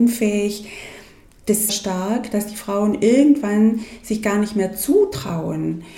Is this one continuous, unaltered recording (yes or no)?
no